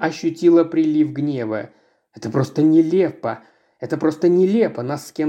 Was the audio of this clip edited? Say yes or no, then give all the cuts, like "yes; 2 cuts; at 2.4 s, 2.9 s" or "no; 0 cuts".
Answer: no; 0 cuts